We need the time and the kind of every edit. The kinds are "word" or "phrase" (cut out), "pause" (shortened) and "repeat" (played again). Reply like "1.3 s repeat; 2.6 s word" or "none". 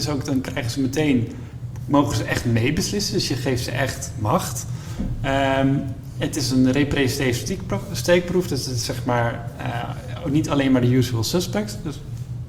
none